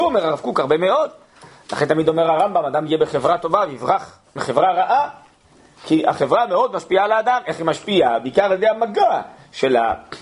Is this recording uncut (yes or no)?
yes